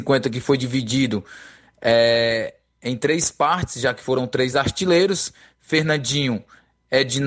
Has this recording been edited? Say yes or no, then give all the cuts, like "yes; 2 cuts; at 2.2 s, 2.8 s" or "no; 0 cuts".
no; 0 cuts